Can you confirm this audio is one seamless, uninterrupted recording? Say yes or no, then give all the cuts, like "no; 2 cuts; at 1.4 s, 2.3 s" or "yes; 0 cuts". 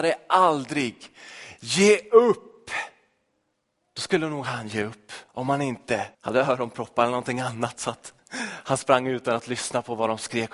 no; 3 cuts; at 3.5 s, 5.3 s, 6.1 s